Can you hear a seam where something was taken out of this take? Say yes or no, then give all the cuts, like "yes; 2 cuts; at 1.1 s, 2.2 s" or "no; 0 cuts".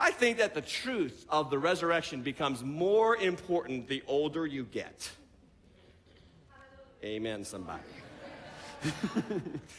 no; 0 cuts